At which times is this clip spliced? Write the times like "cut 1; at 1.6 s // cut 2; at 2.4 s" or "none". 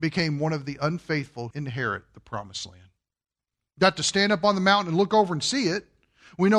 cut 1; at 1.5 s